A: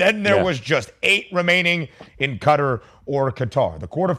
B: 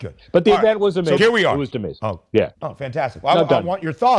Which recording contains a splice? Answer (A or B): B